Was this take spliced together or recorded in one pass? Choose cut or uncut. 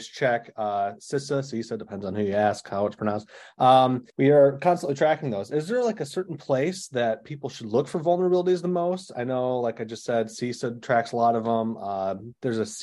cut